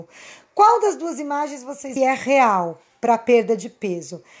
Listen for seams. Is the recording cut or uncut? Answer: cut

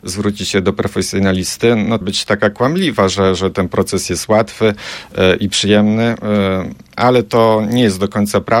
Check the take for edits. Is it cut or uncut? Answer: cut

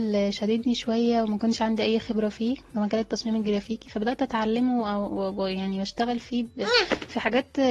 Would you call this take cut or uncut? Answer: uncut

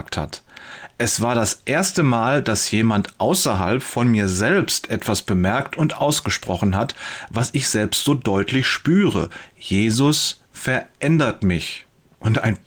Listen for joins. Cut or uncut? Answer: uncut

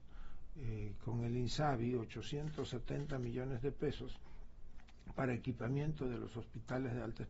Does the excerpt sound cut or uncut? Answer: uncut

